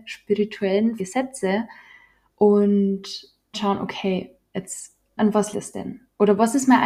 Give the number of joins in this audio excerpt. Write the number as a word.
four